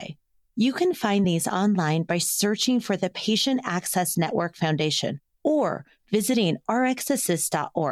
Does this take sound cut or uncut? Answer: uncut